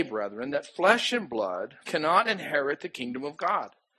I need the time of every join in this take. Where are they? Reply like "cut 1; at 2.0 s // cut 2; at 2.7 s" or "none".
cut 1; at 1.8 s